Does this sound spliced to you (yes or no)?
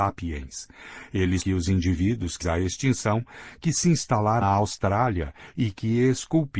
yes